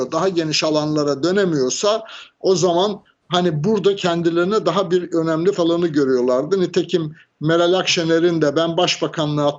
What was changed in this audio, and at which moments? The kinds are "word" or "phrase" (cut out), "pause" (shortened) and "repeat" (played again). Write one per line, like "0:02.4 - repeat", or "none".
0:05.5 - word